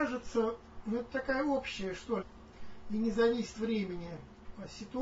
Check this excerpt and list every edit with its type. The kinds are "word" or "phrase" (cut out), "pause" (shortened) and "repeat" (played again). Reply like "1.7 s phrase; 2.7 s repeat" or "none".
2.2 s word; 3.5 s word

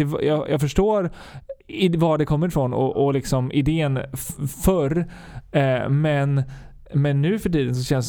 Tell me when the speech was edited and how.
none

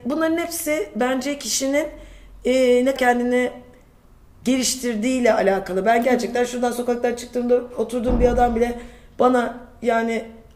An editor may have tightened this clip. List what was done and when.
3.0 s word

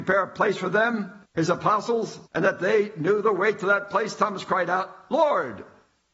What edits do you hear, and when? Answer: 1.2 s pause; 2.3 s pause

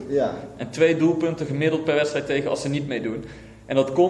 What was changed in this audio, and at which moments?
none

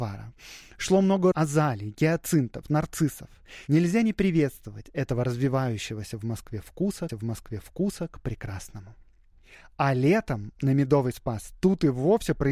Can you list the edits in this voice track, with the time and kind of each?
1.3 s word; 2.6 s word; 7.1 s repeat

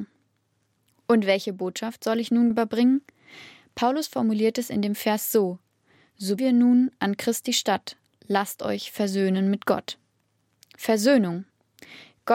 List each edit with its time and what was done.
2.5 s word; 6.4 s word

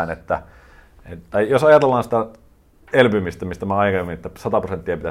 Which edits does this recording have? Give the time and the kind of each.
none

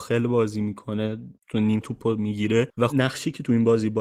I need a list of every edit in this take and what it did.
1.8 s word; 2.9 s word

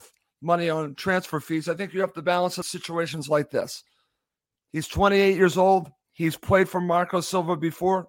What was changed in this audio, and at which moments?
2.6 s phrase

